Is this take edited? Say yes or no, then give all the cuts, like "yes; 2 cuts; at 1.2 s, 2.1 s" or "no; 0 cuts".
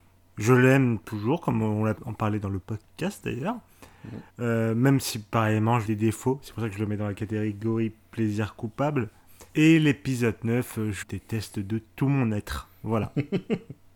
yes; 6 cuts; at 2.0 s, 2.6 s, 4.3 s, 5.8 s, 9.5 s, 11.0 s